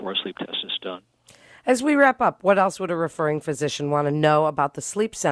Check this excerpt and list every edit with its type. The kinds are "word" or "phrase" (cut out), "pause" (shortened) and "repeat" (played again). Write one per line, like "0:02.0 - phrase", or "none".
none

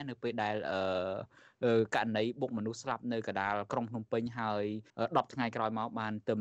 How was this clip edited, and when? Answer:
0:04.9 - pause

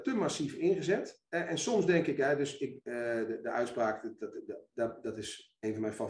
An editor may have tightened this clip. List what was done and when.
none

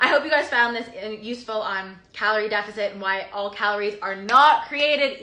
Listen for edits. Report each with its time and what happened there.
none

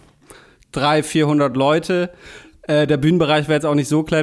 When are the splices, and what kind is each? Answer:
none

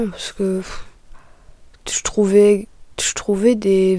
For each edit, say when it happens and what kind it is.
none

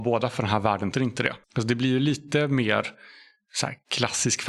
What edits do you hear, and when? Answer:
0:00.9 - word
0:01.4 - pause

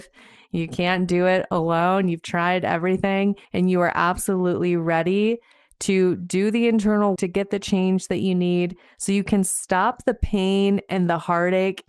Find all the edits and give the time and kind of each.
0:03.4 - pause
0:07.2 - word

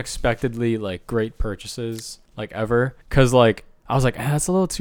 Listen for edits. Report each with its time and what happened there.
0:02.2 - pause
0:03.0 - pause

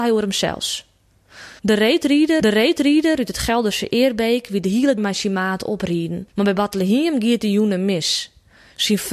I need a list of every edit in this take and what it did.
0:01.6 - pause
0:02.4 - repeat
0:05.0 - word
0:06.3 - pause

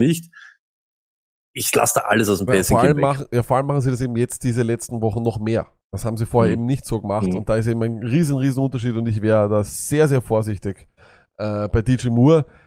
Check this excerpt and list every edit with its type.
none

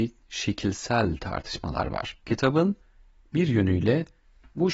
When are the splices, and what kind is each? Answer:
0:02.2 - pause

